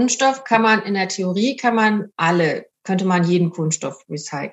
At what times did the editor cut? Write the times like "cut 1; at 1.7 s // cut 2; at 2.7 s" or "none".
cut 1; at 2.1 s